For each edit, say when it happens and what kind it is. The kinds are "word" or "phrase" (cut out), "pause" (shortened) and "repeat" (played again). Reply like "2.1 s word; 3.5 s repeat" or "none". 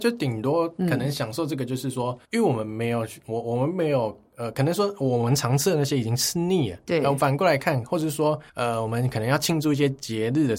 2.2 s pause; 8.5 s pause